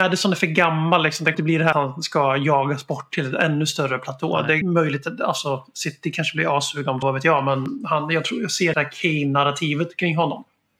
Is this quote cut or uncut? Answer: cut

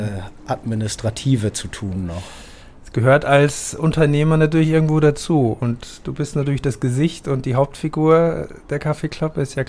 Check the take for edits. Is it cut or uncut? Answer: uncut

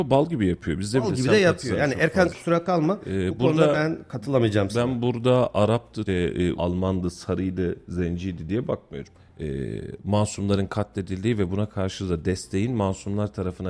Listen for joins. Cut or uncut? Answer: cut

